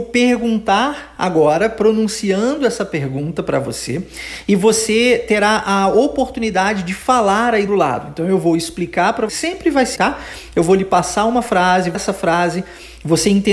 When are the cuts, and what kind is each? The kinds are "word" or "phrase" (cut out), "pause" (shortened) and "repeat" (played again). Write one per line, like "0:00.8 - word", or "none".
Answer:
0:07.7 - word
0:09.3 - word
0:10.0 - word
0:11.9 - word